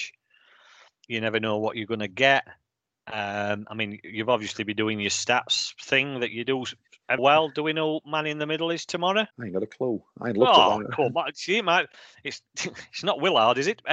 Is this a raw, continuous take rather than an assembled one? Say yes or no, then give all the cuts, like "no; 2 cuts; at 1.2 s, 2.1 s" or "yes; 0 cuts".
no; 2 cuts; at 7.2 s, 9.3 s